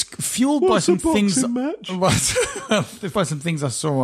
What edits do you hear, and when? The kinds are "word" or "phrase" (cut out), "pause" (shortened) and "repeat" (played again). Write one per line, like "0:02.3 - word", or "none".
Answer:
0:03.1 - word